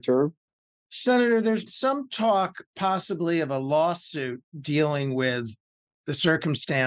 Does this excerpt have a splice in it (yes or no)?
yes